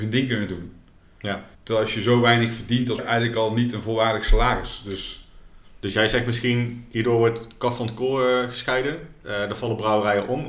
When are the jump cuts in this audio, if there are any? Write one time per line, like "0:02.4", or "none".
0:01.5
0:03.0